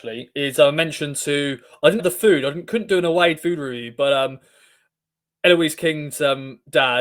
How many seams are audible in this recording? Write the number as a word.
two